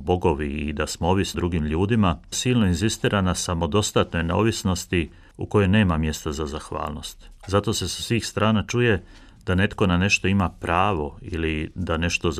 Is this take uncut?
no; 3 cuts; at 1.3 s, 2.3 s, 7.4 s

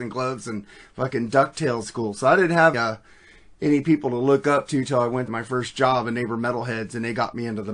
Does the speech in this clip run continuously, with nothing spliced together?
no; 3 cuts; at 1.8 s, 2.7 s, 5.3 s

